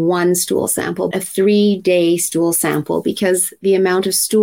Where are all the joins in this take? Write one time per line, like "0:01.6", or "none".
0:01.1

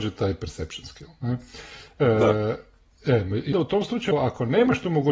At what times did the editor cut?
0:03.5
0:04.1

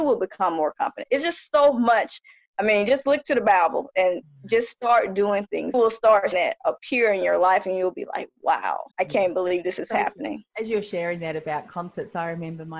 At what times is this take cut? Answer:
0:05.7
0:06.3
0:08.9

